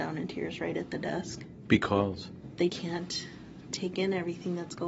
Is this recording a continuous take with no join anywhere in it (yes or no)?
no